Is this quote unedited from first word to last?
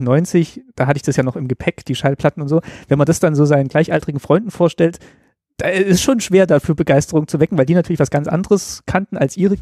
yes; 0 cuts

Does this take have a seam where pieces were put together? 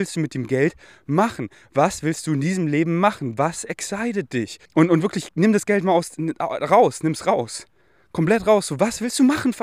yes; 1 cut; at 4.6 s

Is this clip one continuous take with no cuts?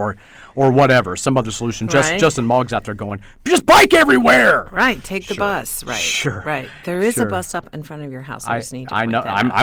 yes; 0 cuts

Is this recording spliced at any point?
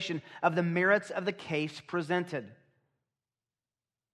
no; 0 cuts

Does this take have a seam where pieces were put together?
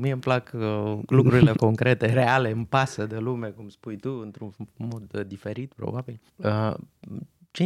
yes; 2 cuts; at 1.5 s, 6.3 s

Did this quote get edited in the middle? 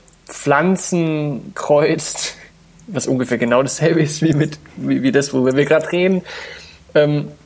no; 0 cuts

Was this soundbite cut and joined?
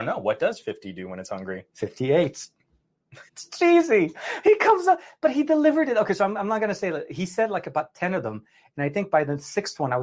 yes; 1 cut; at 3.3 s

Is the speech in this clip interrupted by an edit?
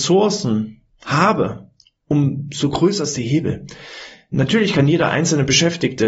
no; 0 cuts

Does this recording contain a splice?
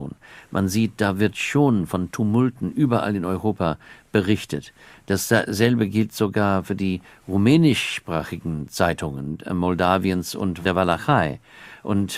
no; 0 cuts

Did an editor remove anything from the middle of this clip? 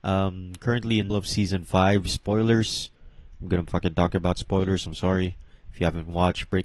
yes; 1 cut; at 1.1 s

